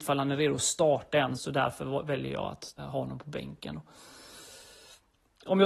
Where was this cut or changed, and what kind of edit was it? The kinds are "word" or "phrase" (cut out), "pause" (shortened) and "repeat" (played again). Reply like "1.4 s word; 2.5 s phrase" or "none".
1.4 s word; 2.8 s word